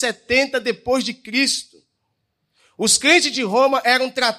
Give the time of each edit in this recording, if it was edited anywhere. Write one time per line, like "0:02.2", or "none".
none